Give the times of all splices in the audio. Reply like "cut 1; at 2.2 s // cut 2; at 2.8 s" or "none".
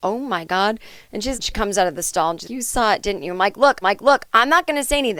cut 1; at 1.3 s // cut 2; at 2.4 s // cut 3; at 3.8 s